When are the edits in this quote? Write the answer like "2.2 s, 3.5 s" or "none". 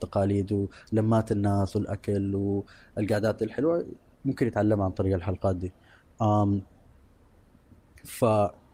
none